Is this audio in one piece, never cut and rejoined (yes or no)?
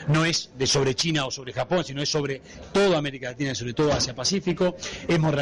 yes